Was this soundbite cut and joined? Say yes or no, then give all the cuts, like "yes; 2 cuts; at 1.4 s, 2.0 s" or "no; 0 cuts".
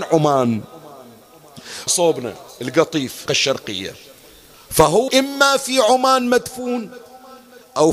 yes; 3 cuts; at 1.9 s, 3.3 s, 5.1 s